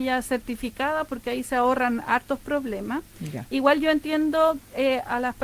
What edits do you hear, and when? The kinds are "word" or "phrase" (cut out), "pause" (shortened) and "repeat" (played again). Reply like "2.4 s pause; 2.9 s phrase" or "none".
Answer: none